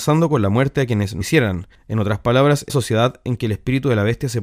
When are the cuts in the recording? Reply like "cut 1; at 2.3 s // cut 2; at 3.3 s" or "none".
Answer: cut 1; at 1.2 s // cut 2; at 2.7 s